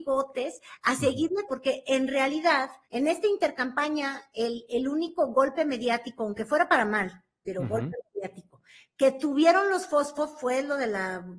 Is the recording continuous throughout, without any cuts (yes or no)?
no